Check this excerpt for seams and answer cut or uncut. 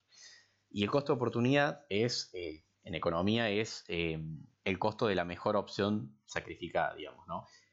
cut